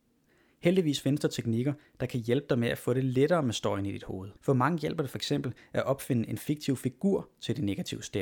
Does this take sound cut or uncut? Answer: cut